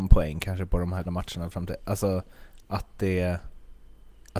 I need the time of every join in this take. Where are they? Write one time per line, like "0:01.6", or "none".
0:01.0